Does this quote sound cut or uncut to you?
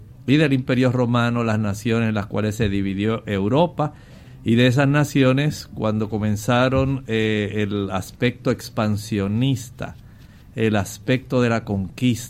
uncut